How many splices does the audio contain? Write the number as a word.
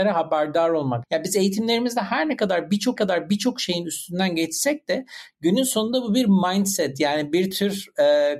one